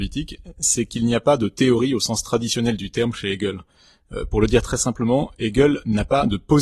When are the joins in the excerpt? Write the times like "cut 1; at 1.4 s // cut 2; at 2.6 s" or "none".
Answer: none